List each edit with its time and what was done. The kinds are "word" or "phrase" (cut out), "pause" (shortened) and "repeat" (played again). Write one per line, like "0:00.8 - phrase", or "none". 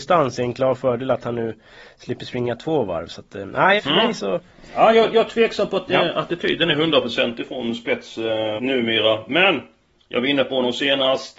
0:03.8 - word
0:08.6 - word